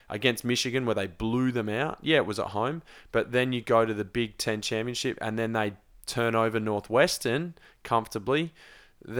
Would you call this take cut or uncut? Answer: uncut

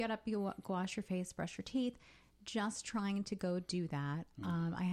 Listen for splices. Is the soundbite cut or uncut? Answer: uncut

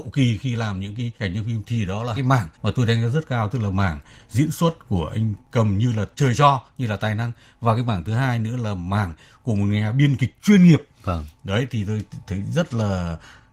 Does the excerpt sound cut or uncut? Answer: cut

